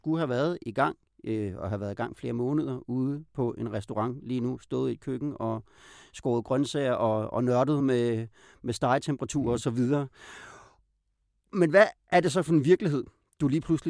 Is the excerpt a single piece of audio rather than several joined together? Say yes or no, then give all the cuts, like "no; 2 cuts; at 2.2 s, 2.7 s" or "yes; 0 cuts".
yes; 0 cuts